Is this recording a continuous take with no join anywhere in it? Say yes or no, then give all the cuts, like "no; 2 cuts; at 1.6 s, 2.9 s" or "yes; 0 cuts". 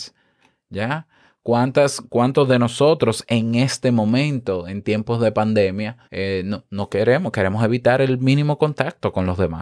no; 1 cut; at 6.0 s